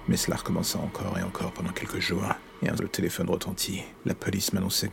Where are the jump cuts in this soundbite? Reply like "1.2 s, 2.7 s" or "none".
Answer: 2.8 s

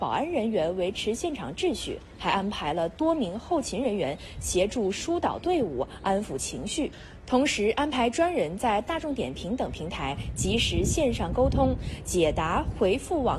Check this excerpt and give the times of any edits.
none

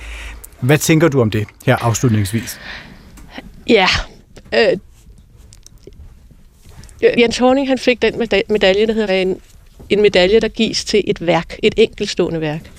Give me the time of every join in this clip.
7.1 s, 9.1 s

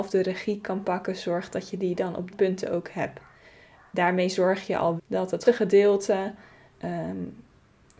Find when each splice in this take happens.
2.3 s, 5.0 s, 5.4 s

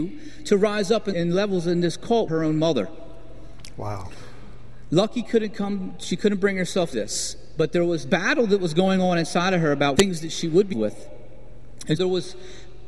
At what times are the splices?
1.1 s, 2.3 s, 6.9 s, 8.0 s, 9.9 s, 10.7 s, 12.0 s

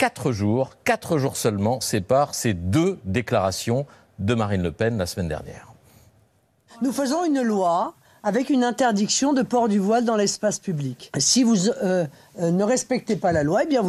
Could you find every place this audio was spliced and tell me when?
none

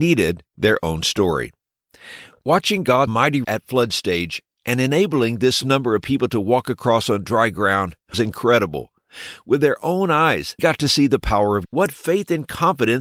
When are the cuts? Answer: 3.1 s, 3.4 s, 5.6 s, 8.1 s, 10.6 s, 11.6 s

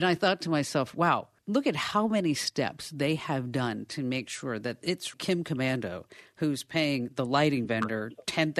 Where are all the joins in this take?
1.4 s, 5.1 s

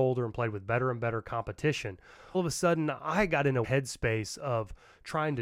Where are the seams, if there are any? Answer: 2.3 s, 3.6 s

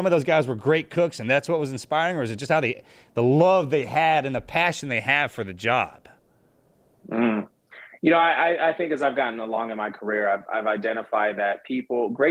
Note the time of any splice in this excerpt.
none

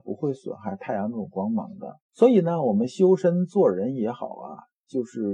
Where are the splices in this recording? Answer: 2.0 s

